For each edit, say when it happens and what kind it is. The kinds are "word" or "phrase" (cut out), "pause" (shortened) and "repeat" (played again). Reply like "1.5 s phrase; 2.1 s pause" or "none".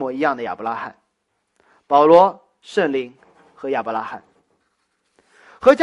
none